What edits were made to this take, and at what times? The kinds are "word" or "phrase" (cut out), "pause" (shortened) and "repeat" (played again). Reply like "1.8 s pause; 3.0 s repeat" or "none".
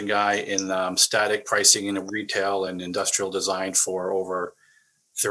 none